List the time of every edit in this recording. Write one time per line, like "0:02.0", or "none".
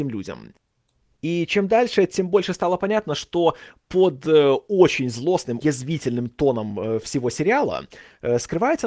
0:05.6